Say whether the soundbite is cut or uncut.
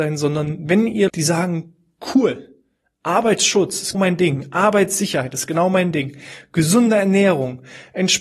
cut